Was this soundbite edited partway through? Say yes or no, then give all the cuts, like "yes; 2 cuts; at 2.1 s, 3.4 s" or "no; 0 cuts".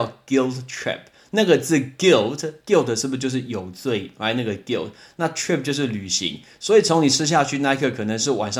no; 0 cuts